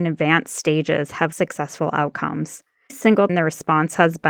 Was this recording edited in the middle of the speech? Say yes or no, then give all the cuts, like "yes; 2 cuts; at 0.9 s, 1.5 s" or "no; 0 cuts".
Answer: yes; 3 cuts; at 1.3 s, 2.9 s, 3.3 s